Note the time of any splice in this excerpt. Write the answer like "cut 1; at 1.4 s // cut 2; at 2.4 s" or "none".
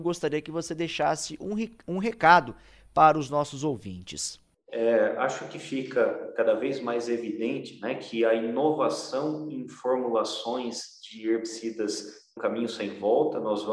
cut 1; at 12.4 s